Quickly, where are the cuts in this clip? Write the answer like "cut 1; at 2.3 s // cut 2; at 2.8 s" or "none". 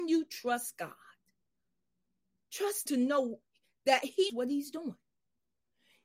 cut 1; at 2.9 s // cut 2; at 4.3 s